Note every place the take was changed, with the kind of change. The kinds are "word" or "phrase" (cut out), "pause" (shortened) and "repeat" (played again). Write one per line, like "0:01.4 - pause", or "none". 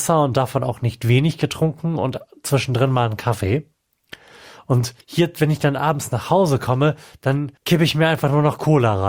0:05.0 - pause
0:07.6 - pause